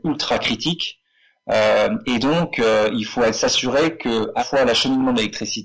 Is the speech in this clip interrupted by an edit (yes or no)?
yes